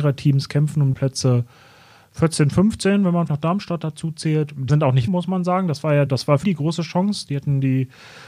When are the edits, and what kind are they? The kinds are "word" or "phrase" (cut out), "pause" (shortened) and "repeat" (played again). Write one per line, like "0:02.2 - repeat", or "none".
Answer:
0:00.9 - word
0:03.3 - word
0:04.7 - word
0:05.1 - word
0:06.1 - word
0:06.4 - word